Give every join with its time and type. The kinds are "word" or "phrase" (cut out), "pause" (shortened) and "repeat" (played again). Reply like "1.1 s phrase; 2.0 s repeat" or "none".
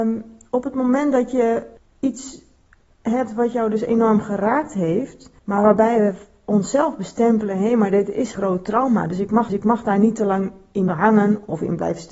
1.8 s pause; 5.4 s pause; 8.3 s word; 9.5 s repeat; 10.9 s word